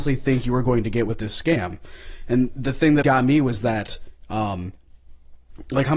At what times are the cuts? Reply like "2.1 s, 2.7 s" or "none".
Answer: 3.0 s